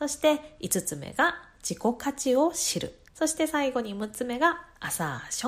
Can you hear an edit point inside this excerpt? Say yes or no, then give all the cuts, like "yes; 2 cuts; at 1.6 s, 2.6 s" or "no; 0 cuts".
yes; 1 cut; at 3.1 s